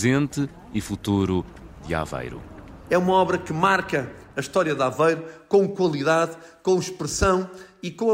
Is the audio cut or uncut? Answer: uncut